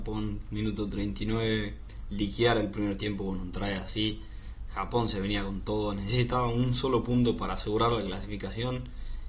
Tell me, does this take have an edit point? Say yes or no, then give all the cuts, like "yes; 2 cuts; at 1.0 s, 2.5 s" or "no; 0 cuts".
no; 0 cuts